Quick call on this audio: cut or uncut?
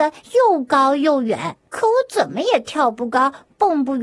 cut